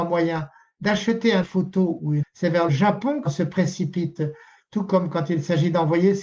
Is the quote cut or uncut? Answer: cut